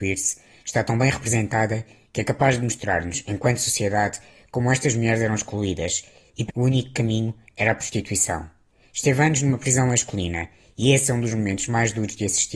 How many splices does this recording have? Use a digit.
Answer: 1